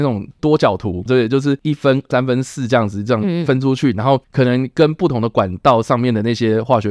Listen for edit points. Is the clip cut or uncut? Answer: cut